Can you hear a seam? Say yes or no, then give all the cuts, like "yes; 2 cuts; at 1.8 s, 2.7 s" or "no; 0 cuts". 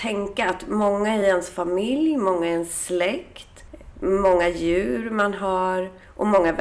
no; 0 cuts